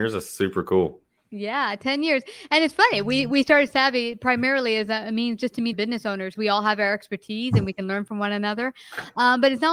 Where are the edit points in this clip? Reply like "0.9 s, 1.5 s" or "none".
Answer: 5.7 s, 6.4 s